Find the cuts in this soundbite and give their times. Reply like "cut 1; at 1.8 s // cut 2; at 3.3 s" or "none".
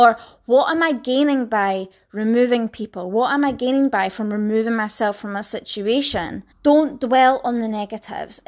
cut 1; at 6.5 s